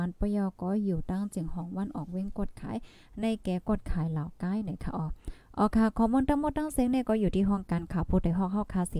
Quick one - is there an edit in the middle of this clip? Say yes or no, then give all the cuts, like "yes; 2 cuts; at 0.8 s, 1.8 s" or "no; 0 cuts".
no; 0 cuts